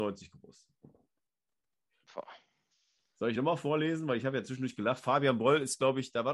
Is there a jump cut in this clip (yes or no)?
no